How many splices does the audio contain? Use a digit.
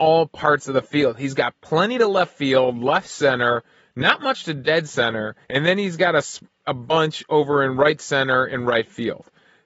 1